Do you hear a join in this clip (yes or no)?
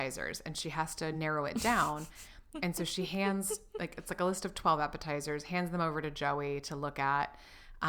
no